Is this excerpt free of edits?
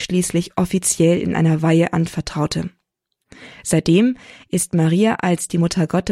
yes; 0 cuts

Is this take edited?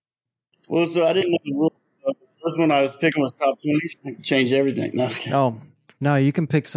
yes; 1 cut; at 4.0 s

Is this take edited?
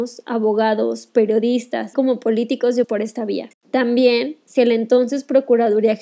yes; 3 cuts; at 1.9 s, 2.8 s, 4.6 s

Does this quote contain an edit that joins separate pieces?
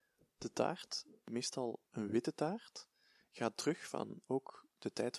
no; 0 cuts

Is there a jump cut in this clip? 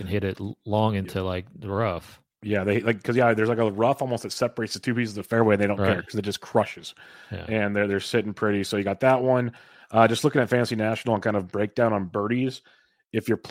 no; 0 cuts

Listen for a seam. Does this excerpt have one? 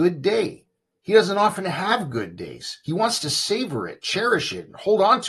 no; 0 cuts

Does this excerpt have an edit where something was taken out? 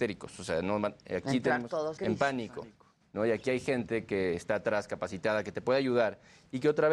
yes; 1 cut; at 2.0 s

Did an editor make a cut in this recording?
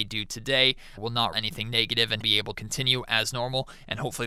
yes; 4 cuts; at 1.0 s, 1.3 s, 2.2 s, 2.5 s

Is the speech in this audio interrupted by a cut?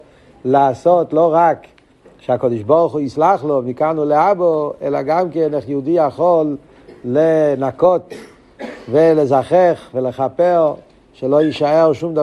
no; 0 cuts

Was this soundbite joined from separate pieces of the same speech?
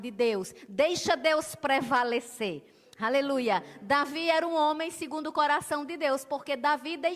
no; 0 cuts

